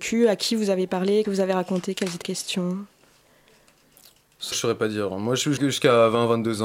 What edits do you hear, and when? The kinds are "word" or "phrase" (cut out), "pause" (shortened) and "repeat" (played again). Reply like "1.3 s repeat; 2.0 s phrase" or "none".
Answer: 1.2 s word; 2.2 s word; 4.5 s word; 5.6 s word